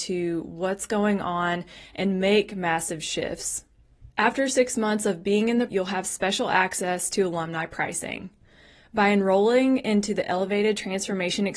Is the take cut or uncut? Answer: cut